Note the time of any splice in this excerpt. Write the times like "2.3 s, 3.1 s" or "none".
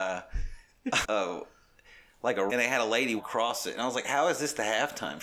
1.0 s, 2.5 s, 3.2 s